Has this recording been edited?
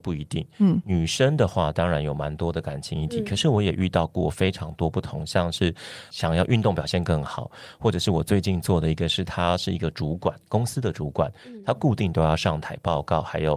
no; 0 cuts

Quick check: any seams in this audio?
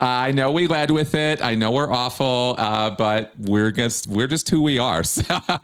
no; 0 cuts

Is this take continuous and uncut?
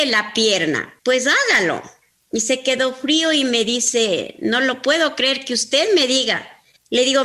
no; 1 cut; at 1.0 s

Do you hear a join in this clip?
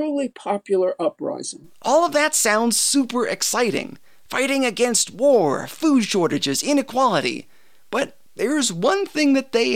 no; 0 cuts

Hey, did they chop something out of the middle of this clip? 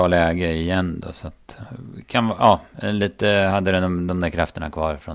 no; 0 cuts

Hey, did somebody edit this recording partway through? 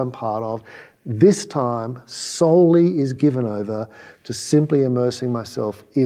no; 0 cuts

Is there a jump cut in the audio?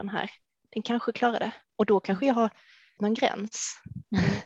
yes; 2 cuts; at 1.7 s, 3.0 s

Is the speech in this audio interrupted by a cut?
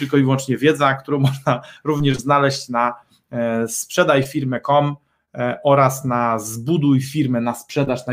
no; 0 cuts

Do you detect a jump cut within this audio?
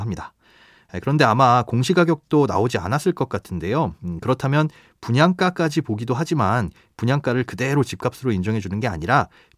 no; 0 cuts

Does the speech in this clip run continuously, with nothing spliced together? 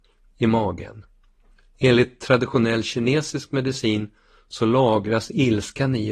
yes; 0 cuts

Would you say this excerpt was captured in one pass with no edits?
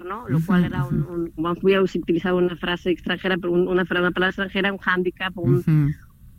no; 1 cut; at 1.4 s

